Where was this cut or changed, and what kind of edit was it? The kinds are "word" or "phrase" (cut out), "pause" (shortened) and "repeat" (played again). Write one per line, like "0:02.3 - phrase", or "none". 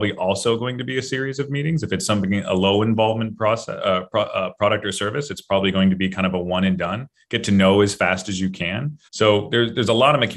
0:09.1 - pause